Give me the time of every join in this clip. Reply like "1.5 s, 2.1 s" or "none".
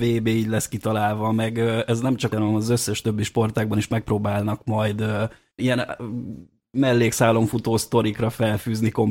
2.3 s, 5.6 s